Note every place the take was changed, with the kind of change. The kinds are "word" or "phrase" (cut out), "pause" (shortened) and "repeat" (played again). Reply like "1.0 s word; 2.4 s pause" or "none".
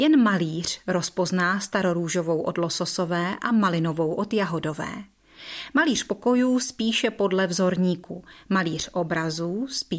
none

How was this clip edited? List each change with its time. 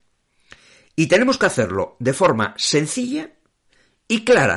none

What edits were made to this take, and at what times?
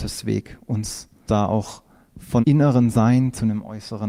1.3 s word; 2.4 s word

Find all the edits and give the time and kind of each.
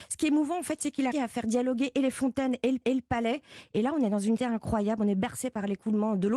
1.1 s word; 2.8 s repeat; 4.4 s word

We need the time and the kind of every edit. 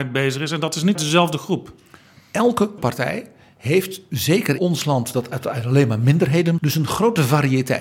0.9 s word; 2.8 s word; 4.6 s word; 6.6 s word

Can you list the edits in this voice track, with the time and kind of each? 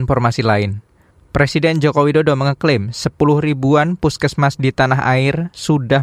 none

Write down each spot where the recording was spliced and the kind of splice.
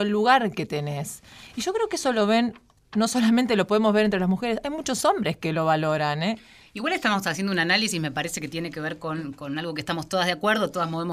none

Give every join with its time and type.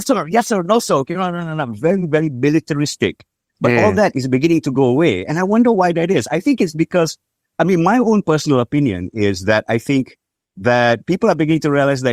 none

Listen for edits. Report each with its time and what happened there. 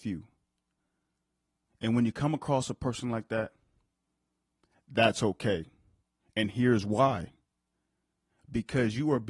6.0 s pause

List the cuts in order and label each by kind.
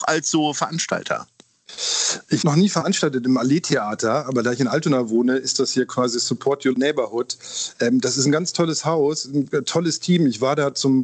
2.4 s word; 6.7 s word

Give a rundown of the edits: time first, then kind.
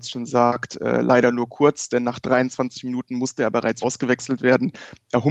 3.8 s word

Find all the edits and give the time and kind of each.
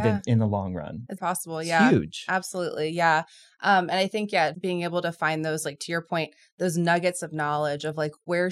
1.2 s word; 4.5 s word

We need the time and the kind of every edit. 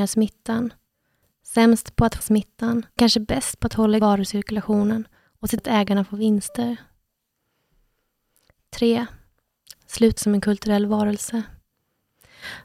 2.2 s word; 3.0 s word; 4.0 s word; 5.6 s word; 10.2 s word

